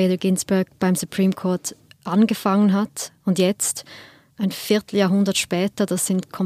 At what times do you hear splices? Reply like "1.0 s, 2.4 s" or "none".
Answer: none